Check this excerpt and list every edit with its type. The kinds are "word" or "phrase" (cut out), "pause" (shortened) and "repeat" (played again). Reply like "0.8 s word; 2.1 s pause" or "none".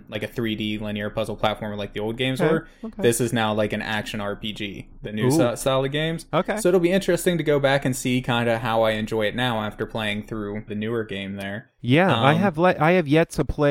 10.7 s phrase